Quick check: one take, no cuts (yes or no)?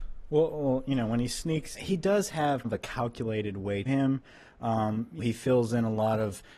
no